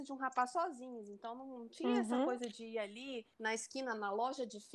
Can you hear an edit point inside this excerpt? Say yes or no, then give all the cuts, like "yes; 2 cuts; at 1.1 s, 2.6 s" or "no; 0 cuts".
yes; 1 cut; at 3.3 s